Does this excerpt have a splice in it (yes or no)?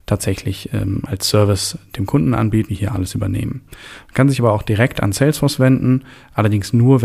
yes